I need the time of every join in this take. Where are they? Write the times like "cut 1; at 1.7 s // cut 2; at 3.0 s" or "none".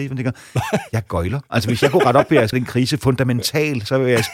cut 1; at 2.5 s